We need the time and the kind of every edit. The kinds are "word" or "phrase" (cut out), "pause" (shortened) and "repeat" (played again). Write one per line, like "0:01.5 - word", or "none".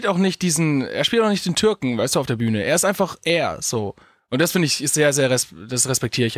none